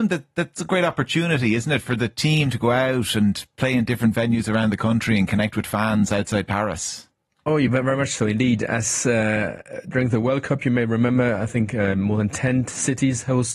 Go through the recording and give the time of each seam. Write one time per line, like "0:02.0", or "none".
none